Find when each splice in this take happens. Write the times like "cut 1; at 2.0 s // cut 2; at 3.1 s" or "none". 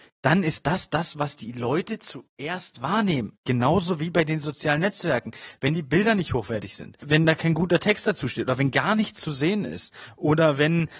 none